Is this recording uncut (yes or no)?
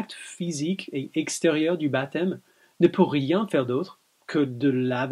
yes